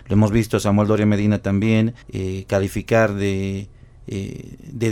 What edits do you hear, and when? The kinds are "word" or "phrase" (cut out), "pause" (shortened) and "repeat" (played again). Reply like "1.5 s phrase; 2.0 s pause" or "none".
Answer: 2.0 s pause